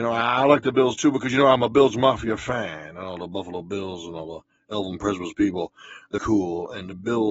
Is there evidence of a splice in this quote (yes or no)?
yes